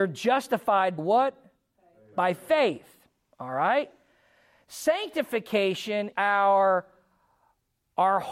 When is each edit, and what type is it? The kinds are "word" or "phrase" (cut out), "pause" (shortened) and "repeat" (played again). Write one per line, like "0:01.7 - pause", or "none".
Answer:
0:01.0 - word
0:06.1 - word